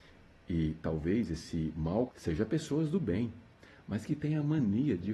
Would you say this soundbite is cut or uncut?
cut